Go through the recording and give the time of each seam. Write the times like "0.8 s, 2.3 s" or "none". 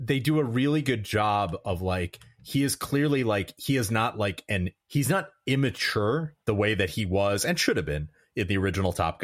4.8 s, 6.4 s